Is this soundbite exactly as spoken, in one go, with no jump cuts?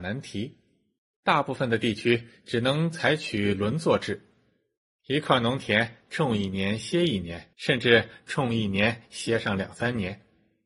no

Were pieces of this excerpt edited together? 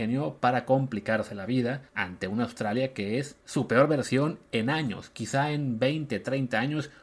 yes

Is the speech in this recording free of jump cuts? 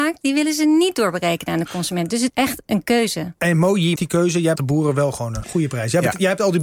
no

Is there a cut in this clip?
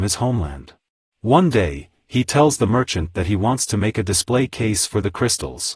yes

